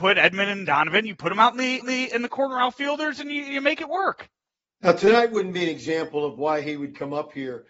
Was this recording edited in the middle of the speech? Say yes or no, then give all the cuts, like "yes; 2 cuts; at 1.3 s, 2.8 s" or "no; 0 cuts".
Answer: yes; 1 cut; at 1.8 s